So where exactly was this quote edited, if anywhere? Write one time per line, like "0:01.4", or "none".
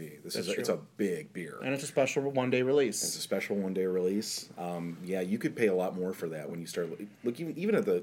none